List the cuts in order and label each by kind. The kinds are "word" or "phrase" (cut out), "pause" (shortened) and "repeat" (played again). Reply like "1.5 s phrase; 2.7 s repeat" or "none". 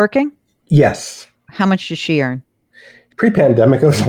none